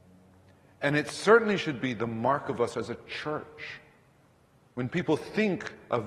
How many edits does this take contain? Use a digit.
0